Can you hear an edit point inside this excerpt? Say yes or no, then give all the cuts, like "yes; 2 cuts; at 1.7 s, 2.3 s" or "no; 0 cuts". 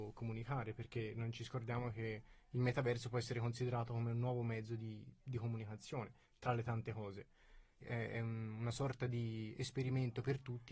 no; 0 cuts